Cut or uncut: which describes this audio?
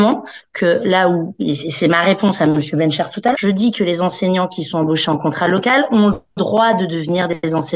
cut